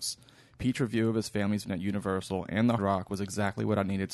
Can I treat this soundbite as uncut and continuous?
no; 2 cuts; at 1.6 s, 2.8 s

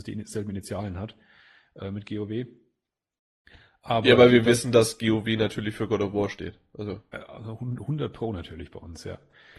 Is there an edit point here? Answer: no; 0 cuts

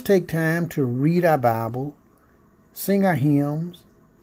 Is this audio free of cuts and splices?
yes; 0 cuts

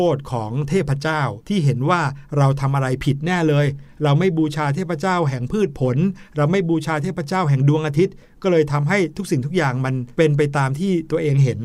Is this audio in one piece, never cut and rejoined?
no; 1 cut; at 1.4 s

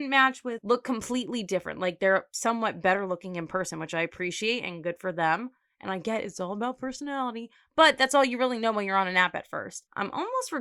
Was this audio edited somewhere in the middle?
no; 0 cuts

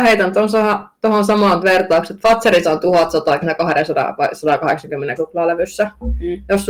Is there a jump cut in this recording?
yes; 4 cuts; at 1.6 s, 2.6 s, 3.4 s, 5.2 s

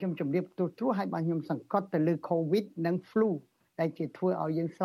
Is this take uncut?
yes; 0 cuts

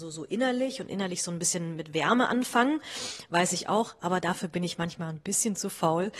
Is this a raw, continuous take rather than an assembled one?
yes; 0 cuts

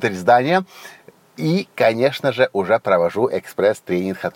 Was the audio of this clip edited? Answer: no; 0 cuts

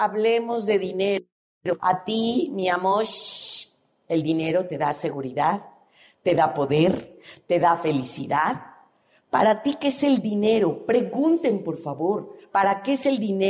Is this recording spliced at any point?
no; 0 cuts

